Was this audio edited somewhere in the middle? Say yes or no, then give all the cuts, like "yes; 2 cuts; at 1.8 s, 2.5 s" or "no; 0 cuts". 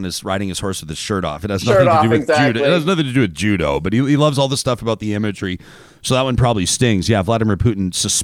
no; 0 cuts